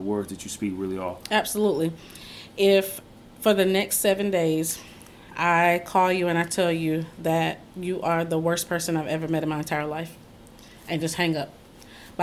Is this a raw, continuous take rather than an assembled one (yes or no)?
yes